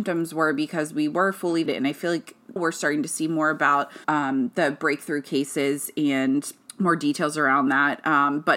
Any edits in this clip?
yes; 4 cuts; at 1.7 s, 2.6 s, 4.0 s, 6.7 s

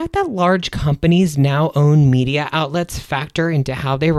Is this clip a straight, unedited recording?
yes; 0 cuts

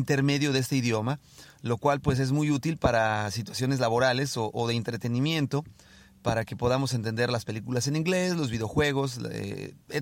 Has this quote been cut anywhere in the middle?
no; 0 cuts

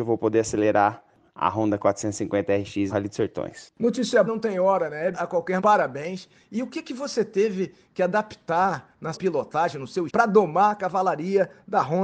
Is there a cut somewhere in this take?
yes; 6 cuts; at 2.9 s, 4.3 s, 5.1 s, 5.6 s, 9.1 s, 10.1 s

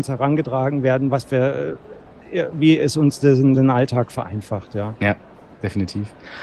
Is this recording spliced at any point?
no; 0 cuts

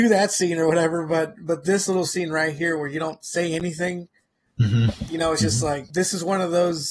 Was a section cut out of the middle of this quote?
no; 0 cuts

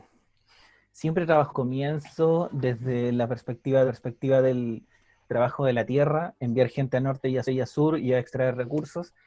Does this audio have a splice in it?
yes; 3 cuts; at 1.5 s, 3.9 s, 7.4 s

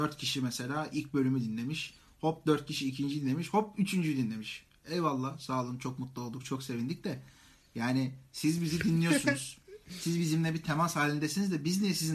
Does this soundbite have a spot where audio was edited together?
no; 0 cuts

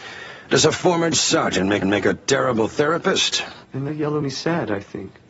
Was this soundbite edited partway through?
yes; 4 cuts; at 1.1 s, 1.8 s, 3.9 s, 4.2 s

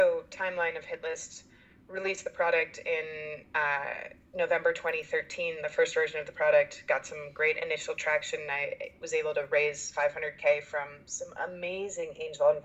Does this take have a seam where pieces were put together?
no; 0 cuts

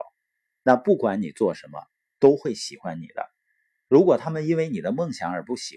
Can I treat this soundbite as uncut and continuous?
yes; 0 cuts

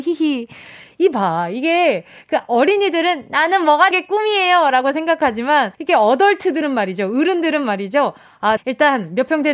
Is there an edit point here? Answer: yes; 3 cuts; at 3.9 s, 5.7 s, 8.6 s

